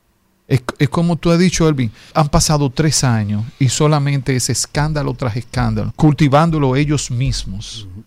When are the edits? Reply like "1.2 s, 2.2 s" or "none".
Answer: 2.1 s, 5.9 s